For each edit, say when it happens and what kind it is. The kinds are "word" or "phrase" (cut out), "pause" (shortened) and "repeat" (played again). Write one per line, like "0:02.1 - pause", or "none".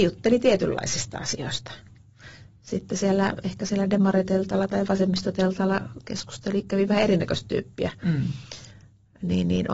none